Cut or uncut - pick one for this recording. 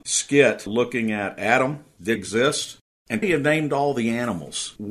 cut